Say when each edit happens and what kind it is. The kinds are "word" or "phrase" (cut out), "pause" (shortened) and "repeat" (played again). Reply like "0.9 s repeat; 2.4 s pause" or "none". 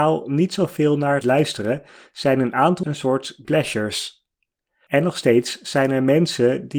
1.2 s word; 2.8 s word; 3.4 s word